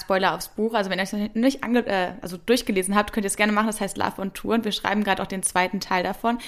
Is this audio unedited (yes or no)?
yes